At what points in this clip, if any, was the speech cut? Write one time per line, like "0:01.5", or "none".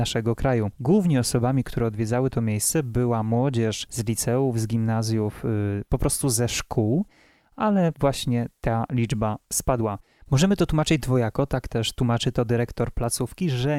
none